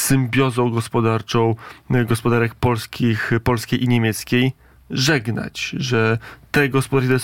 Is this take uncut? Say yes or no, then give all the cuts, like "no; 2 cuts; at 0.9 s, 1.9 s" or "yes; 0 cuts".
yes; 0 cuts